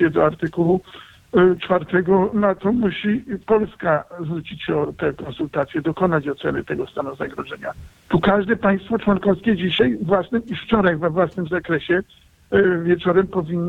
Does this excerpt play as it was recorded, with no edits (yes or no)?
yes